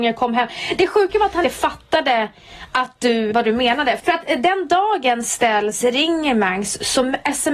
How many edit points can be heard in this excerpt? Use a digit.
2